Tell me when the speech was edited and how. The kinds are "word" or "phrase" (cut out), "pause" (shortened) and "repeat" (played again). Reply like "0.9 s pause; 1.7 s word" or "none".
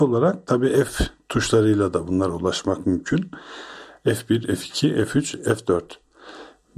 none